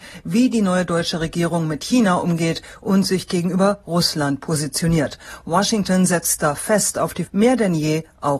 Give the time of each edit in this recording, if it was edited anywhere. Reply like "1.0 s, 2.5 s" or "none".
7.3 s